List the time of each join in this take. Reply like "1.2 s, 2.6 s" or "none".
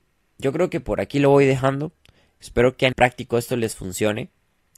2.9 s